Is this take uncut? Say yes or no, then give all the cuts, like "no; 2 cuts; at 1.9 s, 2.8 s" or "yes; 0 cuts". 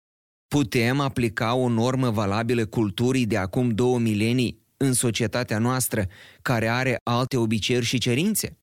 yes; 0 cuts